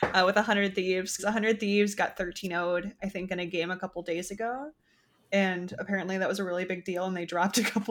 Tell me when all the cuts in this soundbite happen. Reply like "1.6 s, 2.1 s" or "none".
1.2 s